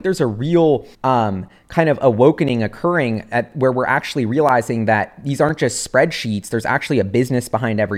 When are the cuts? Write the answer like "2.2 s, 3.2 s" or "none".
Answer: 0.9 s